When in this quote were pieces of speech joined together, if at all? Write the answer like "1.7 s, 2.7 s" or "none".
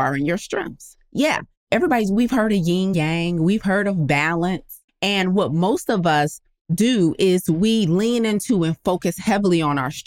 2.9 s, 4.9 s

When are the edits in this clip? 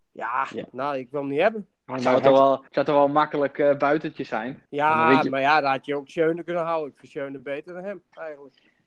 1.8 s, 2.7 s, 4.7 s

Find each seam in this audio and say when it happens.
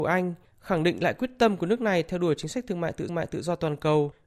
3.1 s

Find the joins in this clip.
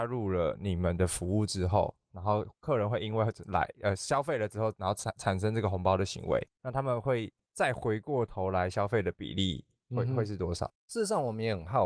6.5 s

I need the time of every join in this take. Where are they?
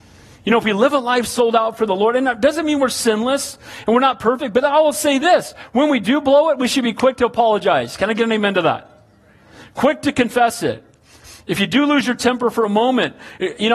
none

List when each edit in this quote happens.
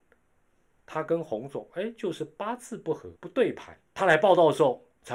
3.2 s, 3.9 s

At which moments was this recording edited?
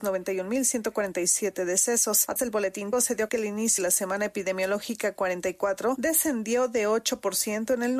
2.4 s, 2.9 s, 3.3 s, 3.8 s

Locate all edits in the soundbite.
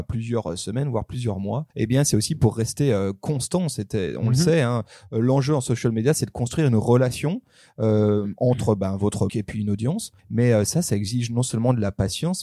1.7 s, 9.3 s, 10.2 s

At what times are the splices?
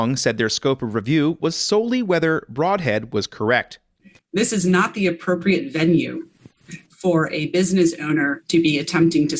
none

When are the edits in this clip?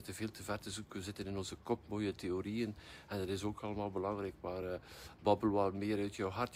none

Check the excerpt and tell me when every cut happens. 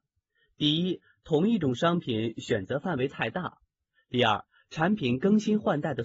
none

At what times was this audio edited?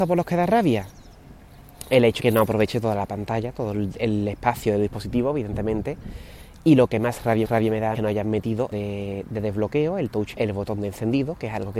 2.2 s, 7.4 s, 7.9 s, 8.7 s, 10.3 s

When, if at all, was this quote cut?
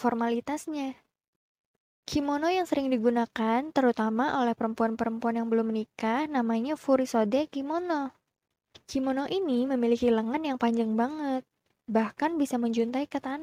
none

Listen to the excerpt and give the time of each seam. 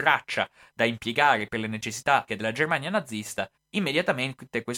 2.3 s, 3.5 s

